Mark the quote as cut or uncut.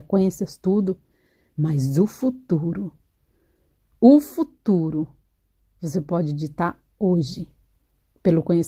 uncut